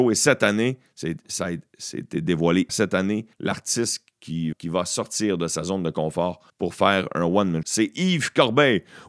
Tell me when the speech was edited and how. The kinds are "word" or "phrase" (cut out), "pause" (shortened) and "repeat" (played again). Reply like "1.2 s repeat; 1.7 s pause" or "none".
2.7 s word; 3.3 s pause; 4.5 s word; 6.5 s pause; 7.6 s word